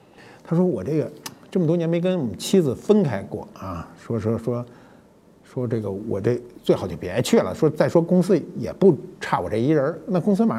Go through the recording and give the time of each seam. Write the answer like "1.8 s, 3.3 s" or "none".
none